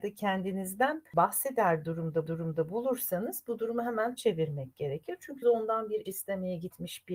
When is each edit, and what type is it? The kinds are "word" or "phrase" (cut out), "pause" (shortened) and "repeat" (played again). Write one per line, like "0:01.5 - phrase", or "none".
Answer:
0:02.3 - repeat
0:04.2 - word
0:05.4 - word
0:06.1 - word